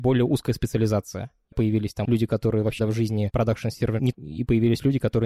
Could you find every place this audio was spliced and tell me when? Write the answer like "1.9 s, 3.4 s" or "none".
1.5 s, 2.1 s, 2.8 s, 4.1 s